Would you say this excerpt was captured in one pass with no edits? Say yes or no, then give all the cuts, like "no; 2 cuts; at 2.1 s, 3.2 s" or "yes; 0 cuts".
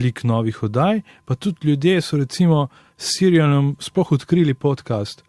yes; 0 cuts